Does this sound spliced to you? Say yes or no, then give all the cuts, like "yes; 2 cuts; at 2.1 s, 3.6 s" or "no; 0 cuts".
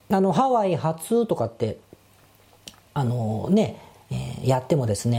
no; 0 cuts